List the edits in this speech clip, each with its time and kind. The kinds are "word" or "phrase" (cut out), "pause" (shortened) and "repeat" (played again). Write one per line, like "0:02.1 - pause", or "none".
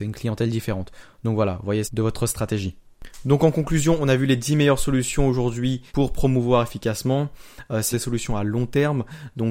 0:01.8 - phrase
0:05.9 - pause
0:07.9 - word